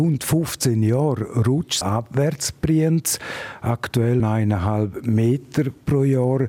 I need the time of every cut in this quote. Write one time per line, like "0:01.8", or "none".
0:01.8
0:04.2